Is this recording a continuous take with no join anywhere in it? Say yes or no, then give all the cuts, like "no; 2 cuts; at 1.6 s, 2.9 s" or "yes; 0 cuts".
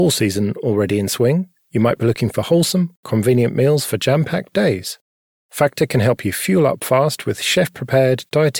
yes; 0 cuts